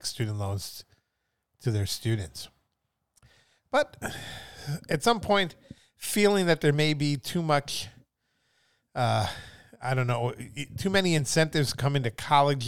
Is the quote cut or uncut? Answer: uncut